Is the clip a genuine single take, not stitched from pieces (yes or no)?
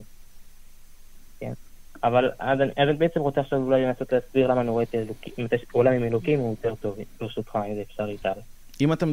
yes